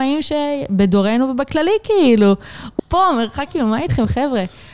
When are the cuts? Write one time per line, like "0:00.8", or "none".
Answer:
0:02.8
0:03.5